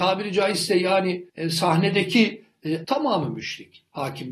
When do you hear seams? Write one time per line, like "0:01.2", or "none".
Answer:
0:01.3
0:02.8